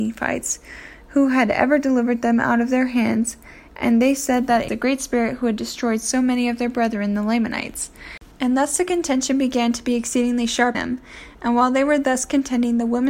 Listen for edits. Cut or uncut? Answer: cut